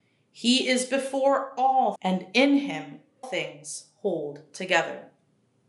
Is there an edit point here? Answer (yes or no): yes